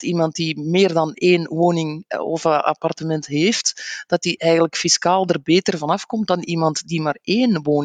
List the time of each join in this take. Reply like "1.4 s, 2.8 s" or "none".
none